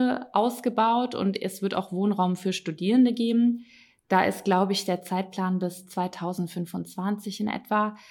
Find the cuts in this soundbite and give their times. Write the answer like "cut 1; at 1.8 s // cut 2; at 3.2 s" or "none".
none